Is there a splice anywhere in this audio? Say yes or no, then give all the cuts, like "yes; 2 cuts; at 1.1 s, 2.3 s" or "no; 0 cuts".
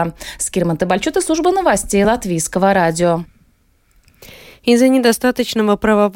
no; 0 cuts